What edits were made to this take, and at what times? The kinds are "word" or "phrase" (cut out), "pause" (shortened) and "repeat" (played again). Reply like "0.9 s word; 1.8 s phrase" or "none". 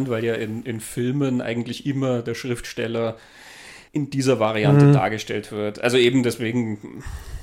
3.9 s pause